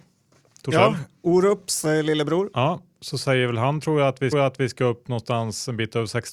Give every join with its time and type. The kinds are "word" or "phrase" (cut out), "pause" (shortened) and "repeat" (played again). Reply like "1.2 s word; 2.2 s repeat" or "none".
4.3 s repeat